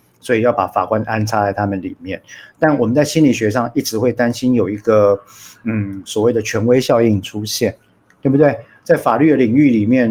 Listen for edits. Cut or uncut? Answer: uncut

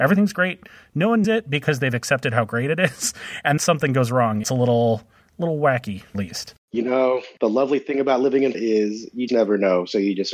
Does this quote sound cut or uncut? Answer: cut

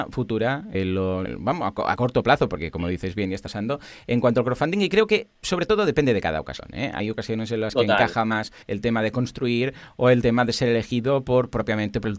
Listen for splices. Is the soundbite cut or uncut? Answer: uncut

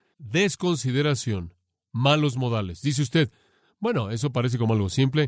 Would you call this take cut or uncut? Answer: uncut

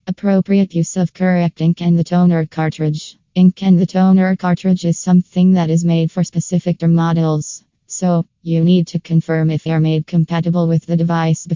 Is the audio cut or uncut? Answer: cut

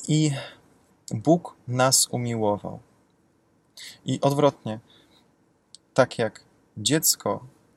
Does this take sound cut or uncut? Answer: uncut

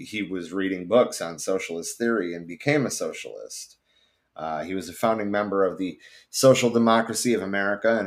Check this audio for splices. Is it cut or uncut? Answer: uncut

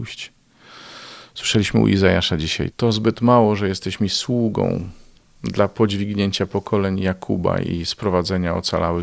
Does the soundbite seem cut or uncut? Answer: uncut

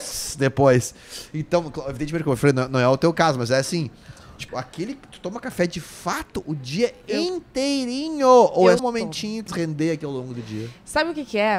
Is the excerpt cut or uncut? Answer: cut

